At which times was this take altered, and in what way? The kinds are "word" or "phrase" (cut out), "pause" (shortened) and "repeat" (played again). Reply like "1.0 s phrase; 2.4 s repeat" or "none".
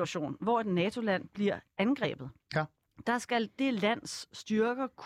none